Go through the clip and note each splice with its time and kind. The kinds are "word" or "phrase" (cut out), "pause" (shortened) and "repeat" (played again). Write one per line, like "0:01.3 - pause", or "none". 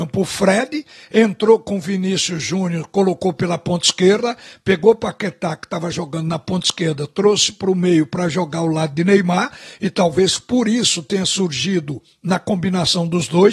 none